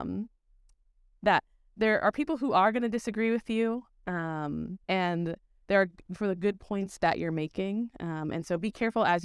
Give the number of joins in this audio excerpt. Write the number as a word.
one